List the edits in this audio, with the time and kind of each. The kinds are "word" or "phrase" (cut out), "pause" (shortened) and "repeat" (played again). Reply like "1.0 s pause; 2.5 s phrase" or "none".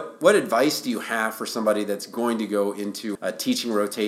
3.1 s word